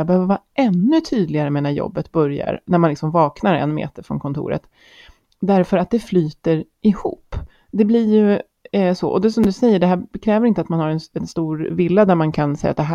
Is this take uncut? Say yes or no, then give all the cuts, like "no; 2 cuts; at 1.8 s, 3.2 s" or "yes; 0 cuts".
yes; 0 cuts